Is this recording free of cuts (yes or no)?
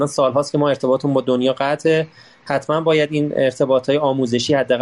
yes